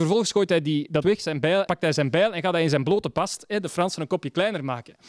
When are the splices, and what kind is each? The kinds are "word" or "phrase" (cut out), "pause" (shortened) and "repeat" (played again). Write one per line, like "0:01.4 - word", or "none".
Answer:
0:01.0 - word
0:01.7 - word